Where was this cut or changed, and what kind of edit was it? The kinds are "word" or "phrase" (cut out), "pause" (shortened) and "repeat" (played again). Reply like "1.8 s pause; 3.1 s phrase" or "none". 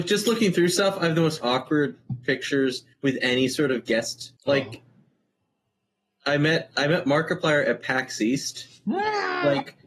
2.9 s pause; 4.4 s pause